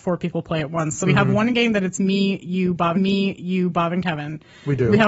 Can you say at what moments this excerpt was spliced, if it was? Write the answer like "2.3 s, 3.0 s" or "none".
1.0 s, 2.9 s

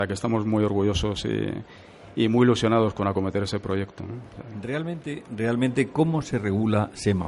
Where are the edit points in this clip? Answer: none

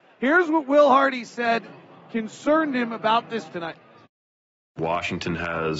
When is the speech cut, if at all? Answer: 3.5 s

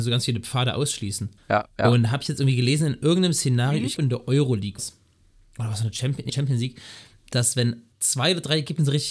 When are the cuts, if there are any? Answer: 1.4 s, 4.0 s, 4.8 s, 6.3 s, 7.9 s

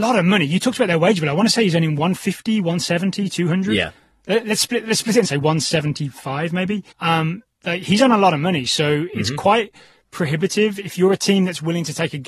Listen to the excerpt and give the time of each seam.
5.2 s, 6.9 s

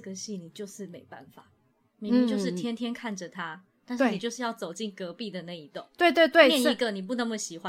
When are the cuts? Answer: none

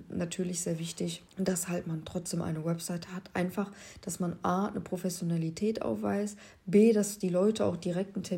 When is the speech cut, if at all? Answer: 1.3 s

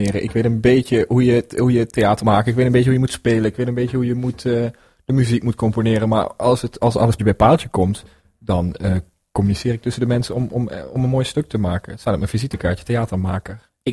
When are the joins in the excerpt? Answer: 2.2 s, 7.2 s

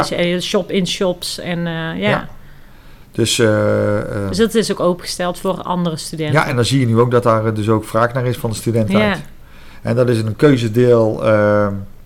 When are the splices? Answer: 3.0 s

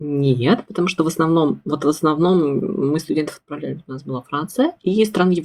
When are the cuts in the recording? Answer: none

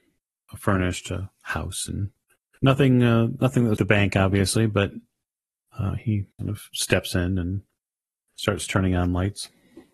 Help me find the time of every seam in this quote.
2.2 s, 3.8 s, 6.3 s

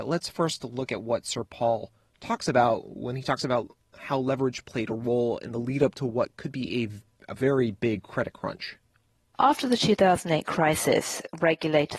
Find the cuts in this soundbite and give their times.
none

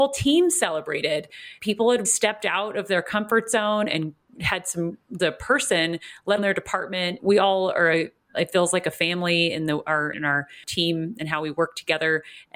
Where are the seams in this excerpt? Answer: 1.6 s, 2.0 s, 5.2 s, 6.4 s, 7.2 s, 10.1 s

